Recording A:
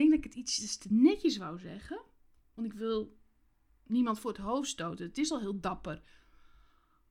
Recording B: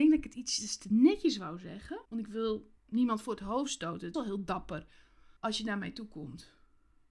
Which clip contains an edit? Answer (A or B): B